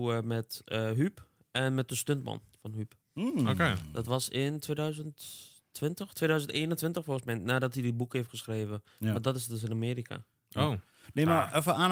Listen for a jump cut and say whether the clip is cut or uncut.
uncut